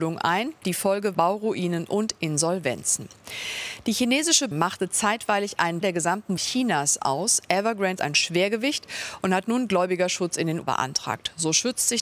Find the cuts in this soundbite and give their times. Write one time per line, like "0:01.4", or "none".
0:01.1
0:04.5
0:05.8
0:06.4
0:08.0
0:10.6